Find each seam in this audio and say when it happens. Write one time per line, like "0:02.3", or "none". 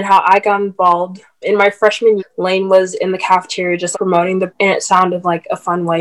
0:01.4
0:02.2
0:03.9
0:04.5